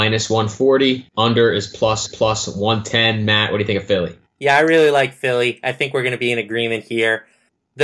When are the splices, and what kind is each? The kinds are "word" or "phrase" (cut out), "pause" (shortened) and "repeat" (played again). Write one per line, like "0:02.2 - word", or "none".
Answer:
0:01.1 - pause
0:02.1 - repeat
0:04.3 - pause